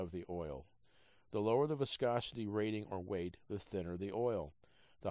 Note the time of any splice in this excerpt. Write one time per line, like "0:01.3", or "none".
none